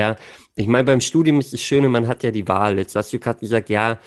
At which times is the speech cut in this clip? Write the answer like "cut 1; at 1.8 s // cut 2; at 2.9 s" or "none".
none